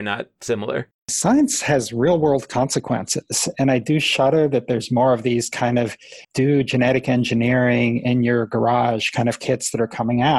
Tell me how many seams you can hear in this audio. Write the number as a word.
two